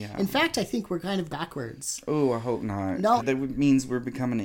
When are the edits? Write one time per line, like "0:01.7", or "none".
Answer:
0:01.3
0:03.2